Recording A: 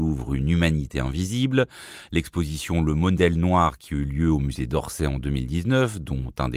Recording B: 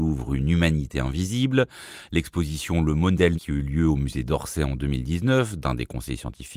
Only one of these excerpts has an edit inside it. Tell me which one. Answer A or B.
B